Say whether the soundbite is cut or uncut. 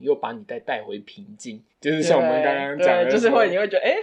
cut